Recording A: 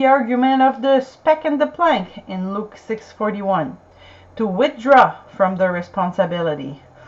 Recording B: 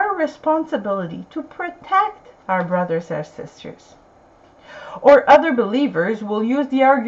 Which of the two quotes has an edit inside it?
B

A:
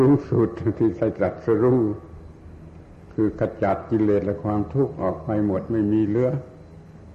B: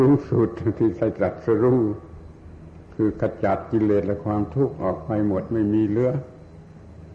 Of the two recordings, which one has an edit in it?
B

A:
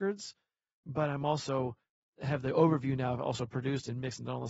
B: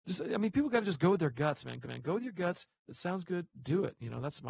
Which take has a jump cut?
B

